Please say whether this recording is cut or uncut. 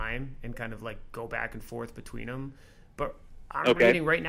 uncut